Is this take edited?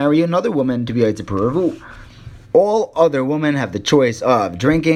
yes; 1 cut; at 2.4 s

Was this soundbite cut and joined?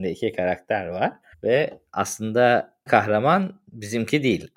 yes; 2 cuts; at 1.3 s, 2.9 s

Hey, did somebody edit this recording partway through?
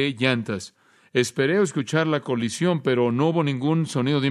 no; 0 cuts

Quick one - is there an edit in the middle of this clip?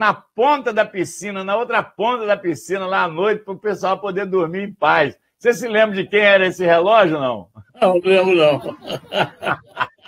yes; 1 cut; at 7.7 s

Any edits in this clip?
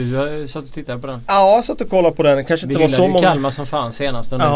no; 0 cuts

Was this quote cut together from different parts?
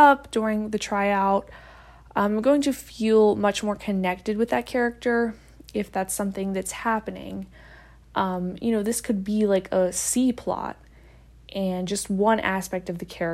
no; 0 cuts

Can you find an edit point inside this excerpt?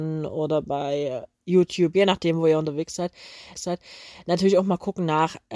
yes; 2 cuts; at 1.3 s, 3.5 s

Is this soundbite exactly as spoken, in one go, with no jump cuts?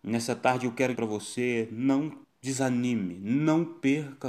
no; 2 cuts; at 0.9 s, 2.2 s

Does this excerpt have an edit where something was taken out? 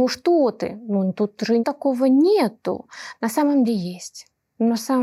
yes; 2 cuts; at 1.6 s, 3.6 s

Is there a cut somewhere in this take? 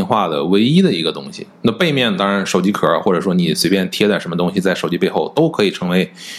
yes; 1 cut; at 1.6 s

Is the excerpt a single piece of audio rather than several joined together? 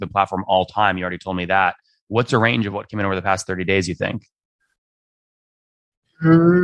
yes; 0 cuts

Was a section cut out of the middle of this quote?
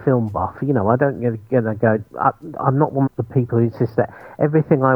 yes; 2 cuts; at 2.1 s, 3.1 s

